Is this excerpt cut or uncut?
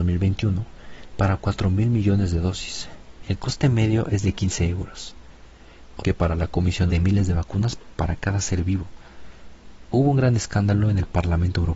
cut